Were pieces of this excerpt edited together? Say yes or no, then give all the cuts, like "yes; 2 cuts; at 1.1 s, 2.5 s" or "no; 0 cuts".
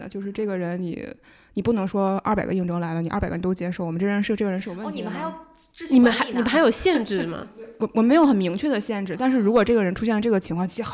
no; 0 cuts